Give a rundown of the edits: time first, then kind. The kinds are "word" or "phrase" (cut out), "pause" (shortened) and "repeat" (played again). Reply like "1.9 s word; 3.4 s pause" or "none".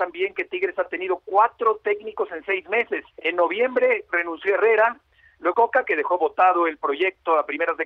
3.1 s pause; 5.5 s word

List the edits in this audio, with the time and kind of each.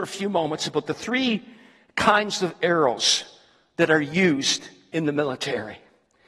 none

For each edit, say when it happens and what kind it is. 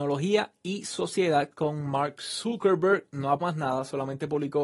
3.4 s word

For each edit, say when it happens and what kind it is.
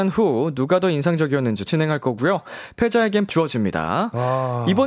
1.6 s word; 3.3 s word

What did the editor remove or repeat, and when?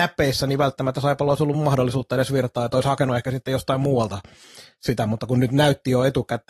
none

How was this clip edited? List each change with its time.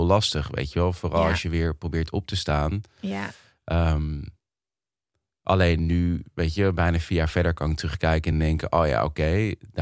none

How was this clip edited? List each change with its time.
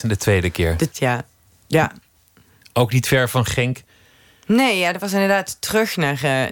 0.9 s phrase

